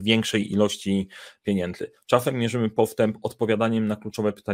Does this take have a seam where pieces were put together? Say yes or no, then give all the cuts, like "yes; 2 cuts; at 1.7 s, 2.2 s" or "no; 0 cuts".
no; 0 cuts